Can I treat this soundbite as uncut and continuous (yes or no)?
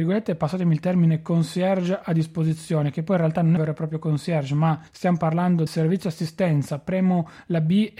no